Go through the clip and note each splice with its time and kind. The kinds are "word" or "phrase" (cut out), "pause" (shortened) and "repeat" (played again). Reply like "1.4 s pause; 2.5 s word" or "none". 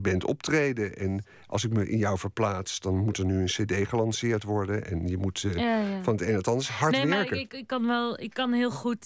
none

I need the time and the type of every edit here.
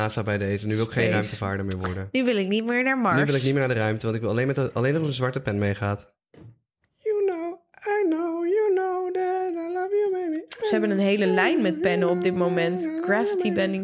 none

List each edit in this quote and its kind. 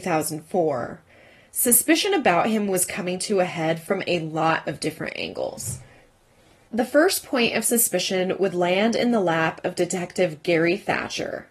none

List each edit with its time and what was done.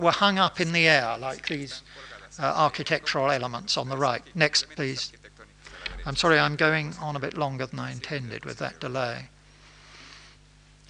none

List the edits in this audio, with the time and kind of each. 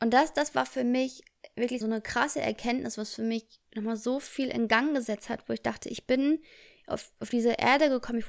1.8 s word

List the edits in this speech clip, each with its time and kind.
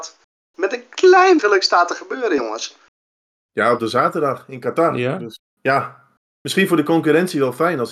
1.4 s word; 3.8 s word; 5.4 s word

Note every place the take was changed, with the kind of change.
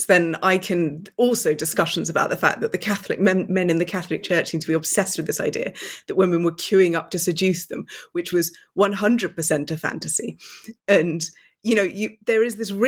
none

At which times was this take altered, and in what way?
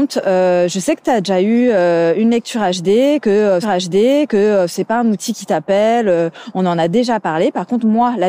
3.6 s repeat

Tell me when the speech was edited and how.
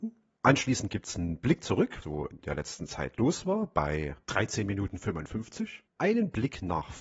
2.0 s word

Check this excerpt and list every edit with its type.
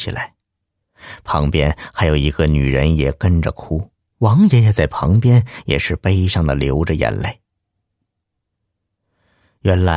4.0 s pause

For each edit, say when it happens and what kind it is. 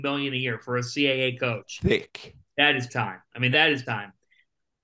2.9 s word; 3.5 s word; 3.8 s word

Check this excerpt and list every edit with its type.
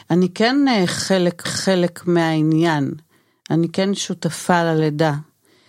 1.4 s repeat

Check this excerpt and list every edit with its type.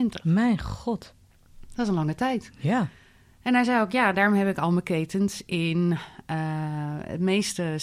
none

